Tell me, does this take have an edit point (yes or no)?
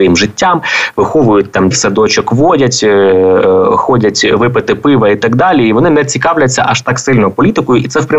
yes